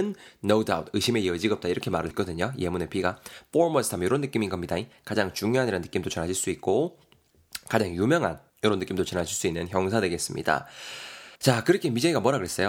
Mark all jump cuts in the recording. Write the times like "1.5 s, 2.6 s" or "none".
2.1 s, 8.5 s, 11.4 s